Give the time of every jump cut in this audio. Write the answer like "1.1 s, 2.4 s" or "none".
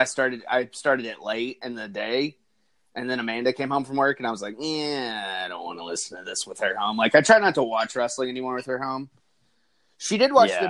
none